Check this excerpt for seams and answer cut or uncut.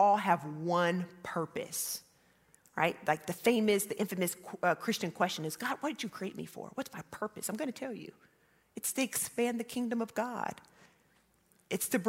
uncut